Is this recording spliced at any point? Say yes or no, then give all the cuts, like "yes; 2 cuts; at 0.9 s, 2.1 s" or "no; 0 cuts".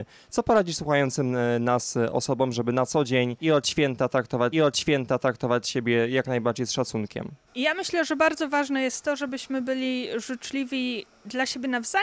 yes; 1 cut; at 4.5 s